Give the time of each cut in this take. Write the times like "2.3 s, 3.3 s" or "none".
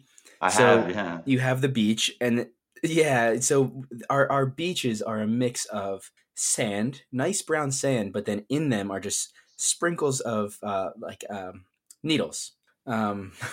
none